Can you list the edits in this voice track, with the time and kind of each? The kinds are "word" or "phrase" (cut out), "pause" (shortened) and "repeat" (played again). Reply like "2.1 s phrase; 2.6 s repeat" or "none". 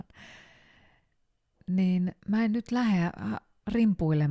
2.2 s pause